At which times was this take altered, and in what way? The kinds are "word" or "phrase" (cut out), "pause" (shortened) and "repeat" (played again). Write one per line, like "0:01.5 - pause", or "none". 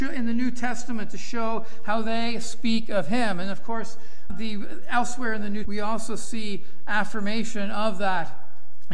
0:04.3 - word
0:05.6 - word